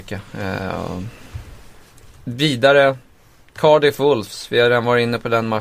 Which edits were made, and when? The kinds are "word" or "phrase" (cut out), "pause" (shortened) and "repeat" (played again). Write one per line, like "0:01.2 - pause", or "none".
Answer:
none